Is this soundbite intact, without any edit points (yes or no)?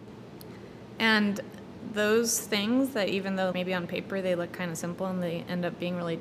no